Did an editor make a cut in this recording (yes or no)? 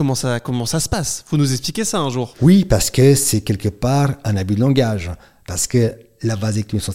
no